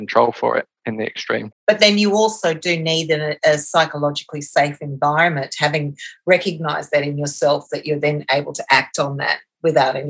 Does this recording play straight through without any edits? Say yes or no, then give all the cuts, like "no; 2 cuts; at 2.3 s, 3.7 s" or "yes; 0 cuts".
no; 1 cut; at 1.5 s